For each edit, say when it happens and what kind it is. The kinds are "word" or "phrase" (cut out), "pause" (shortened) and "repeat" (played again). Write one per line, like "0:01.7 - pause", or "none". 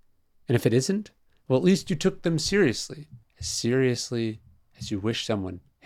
0:03.2 - pause

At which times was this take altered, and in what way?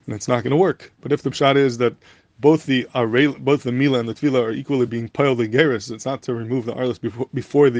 none

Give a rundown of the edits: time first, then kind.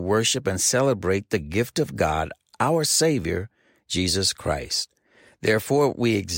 none

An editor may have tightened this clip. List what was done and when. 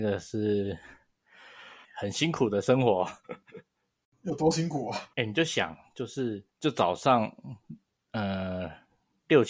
0:01.8 - word
0:05.1 - pause
0:06.5 - pause

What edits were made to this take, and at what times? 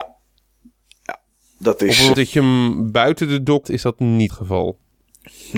0:02.1 - word
0:03.6 - word
0:04.3 - word

